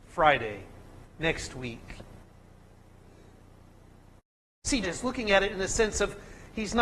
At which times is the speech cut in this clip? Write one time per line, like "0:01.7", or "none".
0:04.8